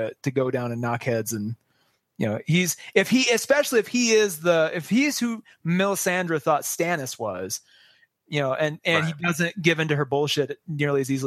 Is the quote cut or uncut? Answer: uncut